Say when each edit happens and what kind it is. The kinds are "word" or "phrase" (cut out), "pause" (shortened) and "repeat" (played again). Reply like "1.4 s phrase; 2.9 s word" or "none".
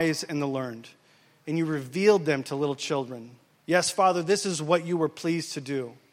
3.5 s pause